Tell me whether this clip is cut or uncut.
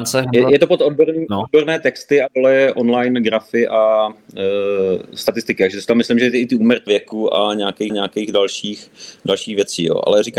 cut